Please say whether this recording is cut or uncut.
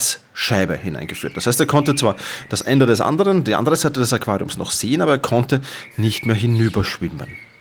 uncut